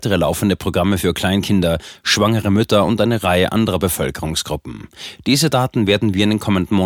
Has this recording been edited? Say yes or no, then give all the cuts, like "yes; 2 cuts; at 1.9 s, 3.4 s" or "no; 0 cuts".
no; 0 cuts